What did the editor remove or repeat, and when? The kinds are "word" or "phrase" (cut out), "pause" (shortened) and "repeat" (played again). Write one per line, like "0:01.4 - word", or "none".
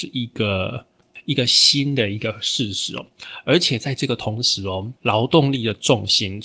0:05.0 - pause

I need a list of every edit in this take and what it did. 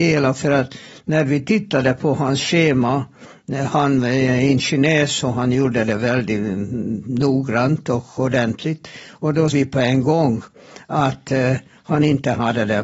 0:09.5 - word

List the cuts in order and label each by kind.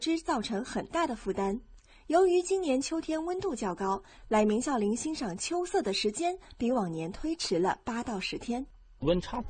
none

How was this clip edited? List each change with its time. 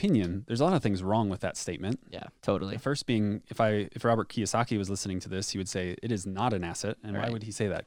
0:02.4 - pause

